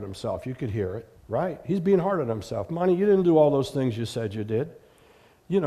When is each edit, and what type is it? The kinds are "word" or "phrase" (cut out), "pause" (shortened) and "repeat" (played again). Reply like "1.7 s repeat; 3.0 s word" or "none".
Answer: 1.2 s pause